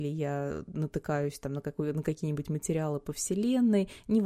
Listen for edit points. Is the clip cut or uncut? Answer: uncut